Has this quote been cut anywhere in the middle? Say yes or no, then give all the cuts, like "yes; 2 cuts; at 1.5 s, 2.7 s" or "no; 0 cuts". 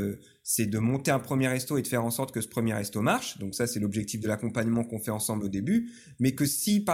no; 0 cuts